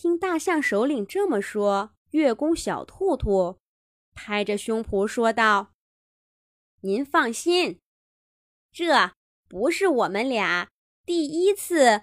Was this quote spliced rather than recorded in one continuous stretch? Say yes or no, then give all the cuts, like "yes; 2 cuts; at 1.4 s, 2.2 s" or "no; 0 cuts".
yes; 1 cut; at 2.0 s